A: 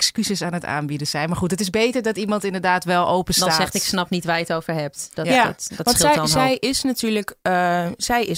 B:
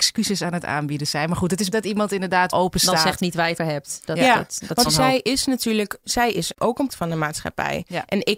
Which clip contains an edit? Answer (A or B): B